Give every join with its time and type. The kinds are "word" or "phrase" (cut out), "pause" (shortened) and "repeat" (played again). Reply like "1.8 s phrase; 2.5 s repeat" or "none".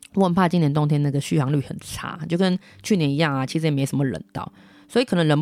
none